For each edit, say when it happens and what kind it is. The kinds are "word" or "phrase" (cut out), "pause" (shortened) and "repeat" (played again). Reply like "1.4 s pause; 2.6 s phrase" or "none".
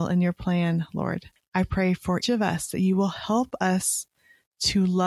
1.4 s pause; 2.2 s word